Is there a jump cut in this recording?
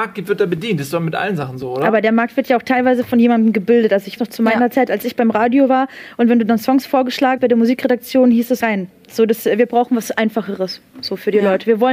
yes; 3 cuts; at 4.2 s, 7.4 s, 8.6 s

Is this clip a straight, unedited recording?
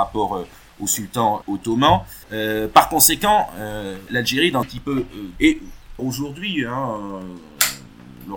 no; 6 cuts; at 1.4 s, 2.2 s, 4.1 s, 4.6 s, 5.4 s, 6.0 s

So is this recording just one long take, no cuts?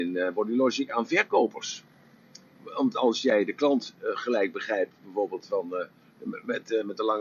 yes; 0 cuts

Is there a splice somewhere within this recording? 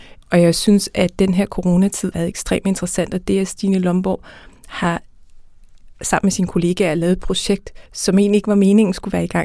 yes; 2 cuts; at 2.1 s, 7.9 s

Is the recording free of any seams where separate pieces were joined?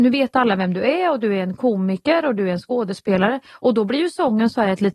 yes; 0 cuts

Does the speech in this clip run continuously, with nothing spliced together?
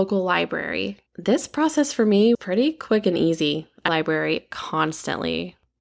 no; 3 cuts; at 1.1 s, 2.3 s, 3.9 s

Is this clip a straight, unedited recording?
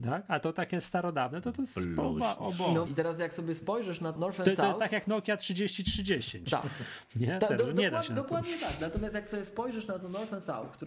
no; 2 cuts; at 2.9 s, 4.2 s

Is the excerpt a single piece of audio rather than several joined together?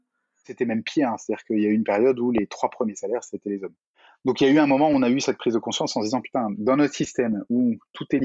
yes; 0 cuts

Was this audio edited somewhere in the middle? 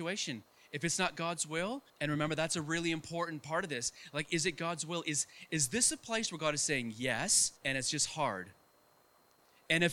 yes; 2 cuts; at 1.9 s, 7.6 s

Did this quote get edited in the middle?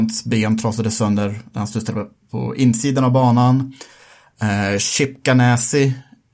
no; 0 cuts

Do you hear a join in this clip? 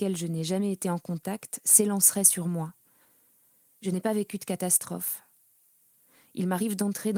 no; 0 cuts

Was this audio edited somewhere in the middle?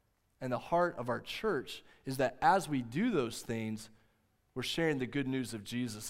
no; 0 cuts

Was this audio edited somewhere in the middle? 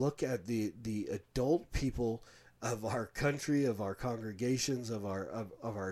no; 0 cuts

